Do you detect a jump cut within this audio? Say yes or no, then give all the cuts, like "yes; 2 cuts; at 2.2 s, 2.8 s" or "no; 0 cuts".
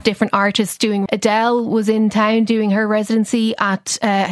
yes; 1 cut; at 1.1 s